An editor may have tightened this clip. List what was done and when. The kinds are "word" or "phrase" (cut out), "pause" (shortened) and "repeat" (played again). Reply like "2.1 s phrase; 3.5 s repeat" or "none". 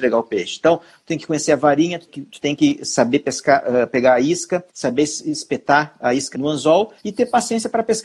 2.1 s word; 4.7 s pause; 6.3 s word; 7.0 s pause